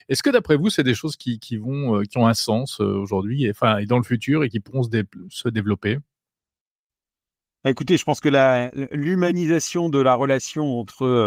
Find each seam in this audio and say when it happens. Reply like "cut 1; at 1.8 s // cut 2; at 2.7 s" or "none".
none